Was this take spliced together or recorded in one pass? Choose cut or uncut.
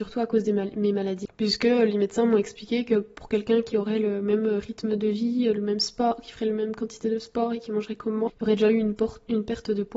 uncut